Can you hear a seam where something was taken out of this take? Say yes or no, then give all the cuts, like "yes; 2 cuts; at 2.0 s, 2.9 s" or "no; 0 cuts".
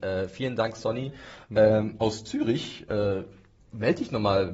no; 0 cuts